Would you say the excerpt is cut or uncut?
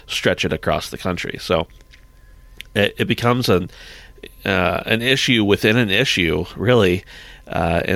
uncut